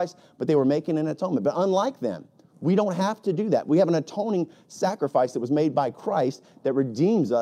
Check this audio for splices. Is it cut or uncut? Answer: uncut